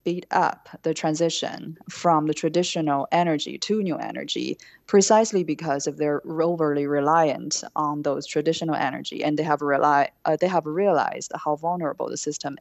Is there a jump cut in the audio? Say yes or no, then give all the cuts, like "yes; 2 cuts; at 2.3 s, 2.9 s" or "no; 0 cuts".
no; 0 cuts